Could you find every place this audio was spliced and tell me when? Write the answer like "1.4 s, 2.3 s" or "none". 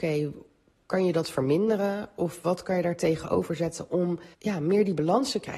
4.3 s